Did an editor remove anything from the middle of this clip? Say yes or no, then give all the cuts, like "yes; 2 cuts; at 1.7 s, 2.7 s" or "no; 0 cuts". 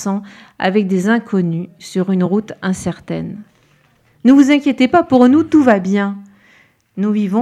no; 0 cuts